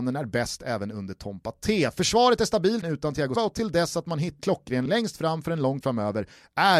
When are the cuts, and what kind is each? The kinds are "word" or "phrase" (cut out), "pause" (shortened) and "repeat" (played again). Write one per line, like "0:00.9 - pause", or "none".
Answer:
0:02.8 - word
0:03.4 - word
0:04.4 - word
0:04.9 - word
0:05.8 - word